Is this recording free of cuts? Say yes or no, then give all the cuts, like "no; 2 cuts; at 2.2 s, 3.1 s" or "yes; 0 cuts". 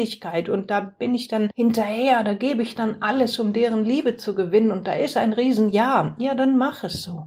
yes; 0 cuts